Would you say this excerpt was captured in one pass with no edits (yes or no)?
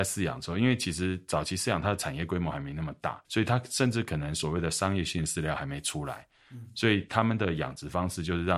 no